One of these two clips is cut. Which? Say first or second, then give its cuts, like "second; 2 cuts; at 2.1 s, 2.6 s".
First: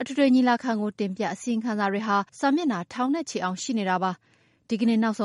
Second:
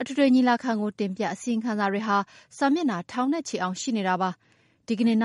first; 1 cut; at 2.3 s